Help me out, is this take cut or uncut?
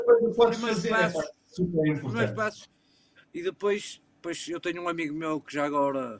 uncut